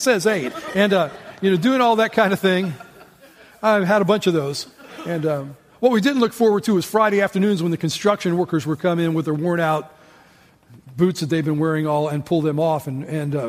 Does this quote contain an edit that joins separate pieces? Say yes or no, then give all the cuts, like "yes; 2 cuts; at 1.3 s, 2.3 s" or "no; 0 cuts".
no; 0 cuts